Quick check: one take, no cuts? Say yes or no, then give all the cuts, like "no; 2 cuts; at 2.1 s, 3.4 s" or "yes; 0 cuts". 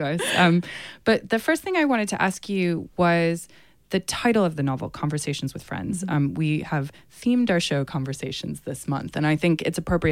yes; 0 cuts